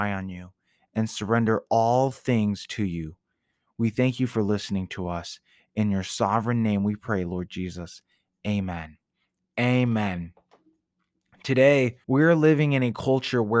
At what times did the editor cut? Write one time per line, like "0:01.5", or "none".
0:12.0